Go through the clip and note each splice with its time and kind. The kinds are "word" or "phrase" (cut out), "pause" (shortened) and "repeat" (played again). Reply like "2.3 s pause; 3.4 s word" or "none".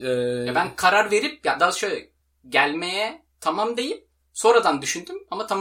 none